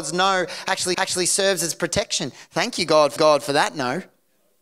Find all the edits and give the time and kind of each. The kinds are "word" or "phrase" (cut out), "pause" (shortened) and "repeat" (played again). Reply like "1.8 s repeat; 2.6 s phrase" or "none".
0.9 s repeat; 3.2 s repeat